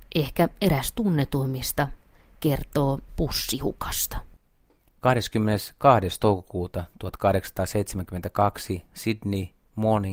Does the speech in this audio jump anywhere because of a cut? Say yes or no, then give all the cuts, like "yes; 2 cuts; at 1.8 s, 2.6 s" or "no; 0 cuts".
yes; 1 cut; at 3.1 s